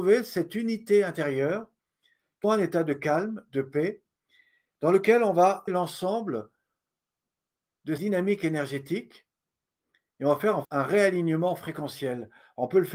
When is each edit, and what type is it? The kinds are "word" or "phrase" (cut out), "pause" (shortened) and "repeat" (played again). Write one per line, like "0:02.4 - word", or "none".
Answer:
0:02.4 - word
0:05.7 - word
0:08.0 - word
0:10.6 - word